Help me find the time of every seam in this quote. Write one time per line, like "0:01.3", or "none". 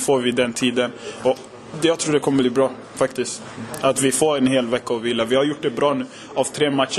none